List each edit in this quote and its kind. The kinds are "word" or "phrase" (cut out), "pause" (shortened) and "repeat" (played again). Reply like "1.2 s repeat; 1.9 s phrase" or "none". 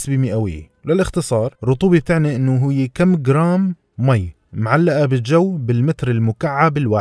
none